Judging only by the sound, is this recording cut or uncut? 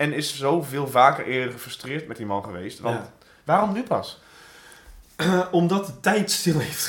uncut